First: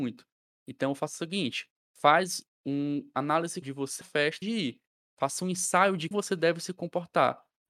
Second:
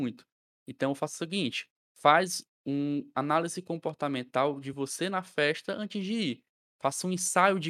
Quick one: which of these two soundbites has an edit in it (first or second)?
first